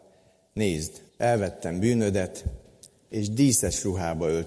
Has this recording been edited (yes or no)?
yes